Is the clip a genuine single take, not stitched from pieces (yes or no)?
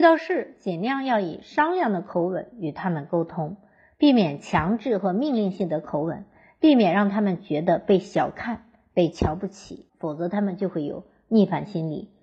no